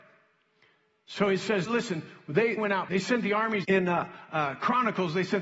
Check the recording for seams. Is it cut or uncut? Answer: cut